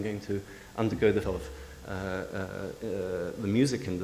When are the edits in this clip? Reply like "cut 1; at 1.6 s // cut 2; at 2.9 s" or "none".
cut 1; at 1.2 s

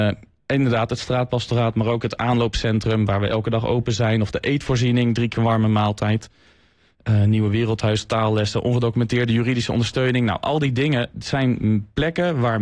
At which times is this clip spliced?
cut 1; at 5.3 s

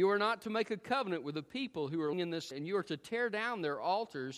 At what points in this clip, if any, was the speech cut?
cut 1; at 2.1 s // cut 2; at 2.5 s

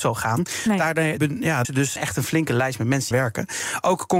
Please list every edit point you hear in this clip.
cut 1; at 1.2 s // cut 2; at 1.6 s // cut 3; at 2.0 s // cut 4; at 3.1 s

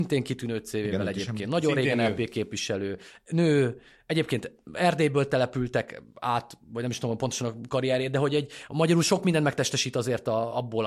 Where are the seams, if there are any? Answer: none

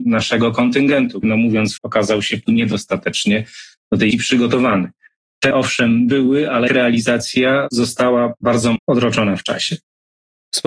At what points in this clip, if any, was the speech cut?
cut 1; at 1.2 s // cut 2; at 1.8 s // cut 3; at 2.4 s // cut 4; at 4.1 s // cut 5; at 5.5 s // cut 6; at 6.7 s // cut 7; at 8.8 s

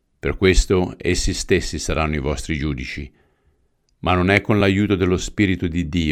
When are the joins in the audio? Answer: none

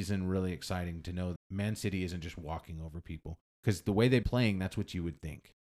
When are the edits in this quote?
cut 1; at 1.4 s // cut 2; at 4.2 s

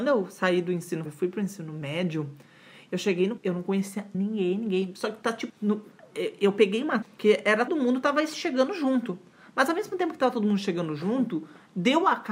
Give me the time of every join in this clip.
cut 1; at 1.1 s // cut 2; at 3.4 s // cut 3; at 4.1 s // cut 4; at 5.5 s // cut 5; at 7.0 s // cut 6; at 7.7 s

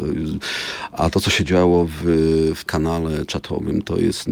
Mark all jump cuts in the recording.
cut 1; at 2.7 s

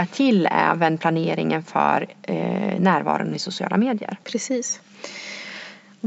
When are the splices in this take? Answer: cut 1; at 4.2 s

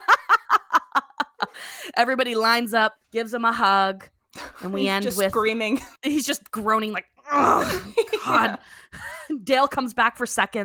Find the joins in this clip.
cut 1; at 3.0 s // cut 2; at 6.0 s

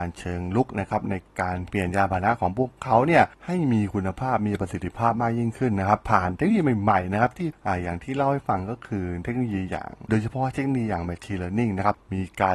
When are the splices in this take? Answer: cut 1; at 10.1 s

